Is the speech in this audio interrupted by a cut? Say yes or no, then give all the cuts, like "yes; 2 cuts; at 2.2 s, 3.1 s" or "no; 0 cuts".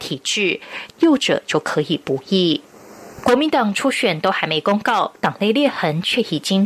yes; 1 cut; at 0.9 s